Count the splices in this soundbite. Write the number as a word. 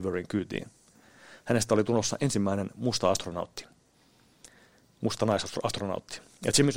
zero